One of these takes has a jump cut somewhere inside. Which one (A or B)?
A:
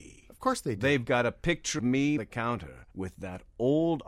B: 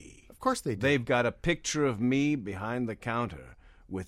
A